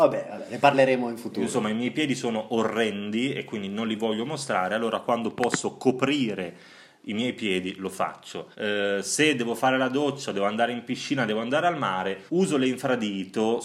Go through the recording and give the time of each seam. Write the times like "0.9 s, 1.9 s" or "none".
8.5 s, 12.3 s